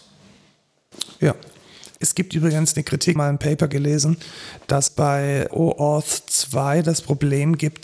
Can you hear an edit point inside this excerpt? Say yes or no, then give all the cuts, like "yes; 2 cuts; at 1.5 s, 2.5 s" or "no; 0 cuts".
yes; 4 cuts; at 1.9 s, 3.2 s, 4.9 s, 5.5 s